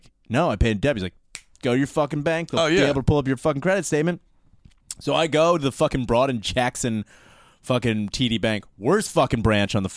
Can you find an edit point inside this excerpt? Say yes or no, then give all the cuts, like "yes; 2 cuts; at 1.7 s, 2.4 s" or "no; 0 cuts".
no; 0 cuts